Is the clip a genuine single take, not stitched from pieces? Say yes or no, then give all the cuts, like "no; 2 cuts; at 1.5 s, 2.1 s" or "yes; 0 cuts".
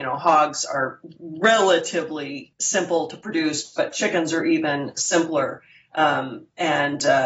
yes; 0 cuts